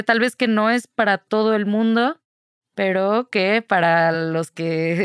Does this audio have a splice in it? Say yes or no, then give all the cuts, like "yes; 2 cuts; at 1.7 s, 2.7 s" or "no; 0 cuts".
no; 0 cuts